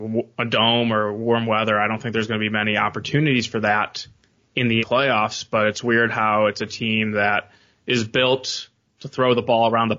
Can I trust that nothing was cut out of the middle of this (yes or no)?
no